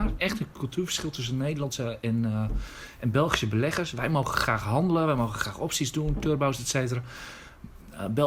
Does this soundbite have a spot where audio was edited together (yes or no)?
no